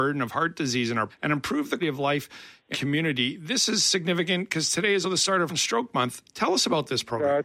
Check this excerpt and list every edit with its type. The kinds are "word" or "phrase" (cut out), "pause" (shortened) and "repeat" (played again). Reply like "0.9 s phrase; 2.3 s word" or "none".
1.1 s word; 1.8 s word; 2.7 s word; 5.0 s word; 5.5 s word